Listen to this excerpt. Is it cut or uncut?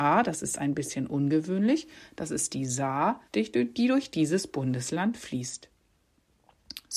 cut